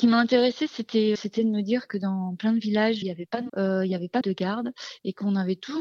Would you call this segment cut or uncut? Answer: cut